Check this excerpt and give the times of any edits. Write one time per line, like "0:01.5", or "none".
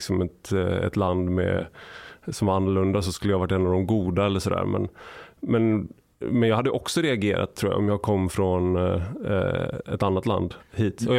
none